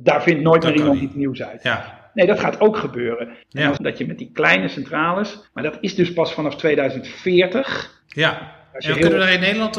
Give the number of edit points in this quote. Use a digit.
3